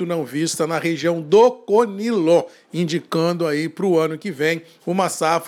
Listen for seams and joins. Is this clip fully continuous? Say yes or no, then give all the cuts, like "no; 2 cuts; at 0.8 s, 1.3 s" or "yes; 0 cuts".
yes; 0 cuts